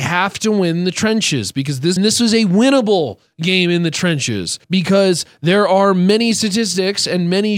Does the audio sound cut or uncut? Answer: cut